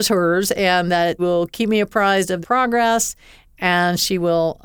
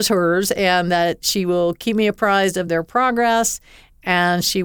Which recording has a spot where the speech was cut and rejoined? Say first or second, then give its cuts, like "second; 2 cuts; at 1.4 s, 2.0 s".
first; 2 cuts; at 1.2 s, 2.4 s